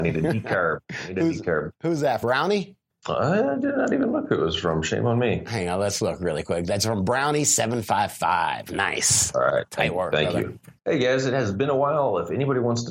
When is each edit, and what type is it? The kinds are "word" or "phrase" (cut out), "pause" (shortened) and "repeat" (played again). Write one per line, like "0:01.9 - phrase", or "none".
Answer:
0:02.2 - word
0:02.9 - pause
0:10.8 - pause